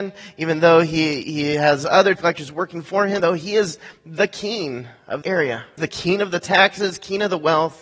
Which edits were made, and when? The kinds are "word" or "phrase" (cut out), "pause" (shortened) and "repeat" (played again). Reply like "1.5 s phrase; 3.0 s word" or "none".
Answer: 2.2 s word; 3.2 s word; 5.2 s word; 5.8 s phrase